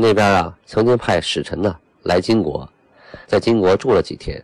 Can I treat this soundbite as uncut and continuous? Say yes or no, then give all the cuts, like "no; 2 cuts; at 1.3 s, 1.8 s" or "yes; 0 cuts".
no; 1 cut; at 3.2 s